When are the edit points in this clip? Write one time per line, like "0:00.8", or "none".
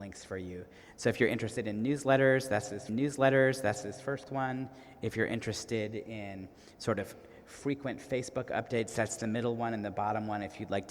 0:02.9